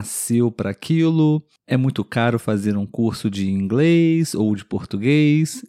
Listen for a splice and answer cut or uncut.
uncut